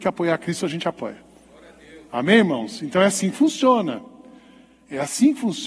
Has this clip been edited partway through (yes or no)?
no